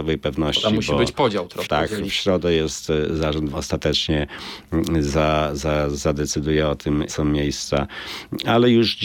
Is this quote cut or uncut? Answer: cut